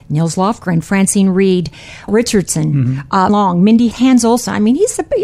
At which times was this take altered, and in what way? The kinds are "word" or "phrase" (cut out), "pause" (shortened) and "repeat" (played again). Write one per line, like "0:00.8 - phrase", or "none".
0:02.1 - word
0:03.3 - word
0:03.9 - word